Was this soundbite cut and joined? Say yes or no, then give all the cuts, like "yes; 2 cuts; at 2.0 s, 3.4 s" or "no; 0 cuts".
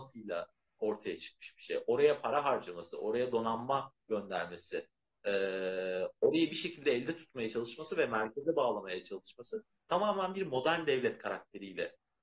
no; 0 cuts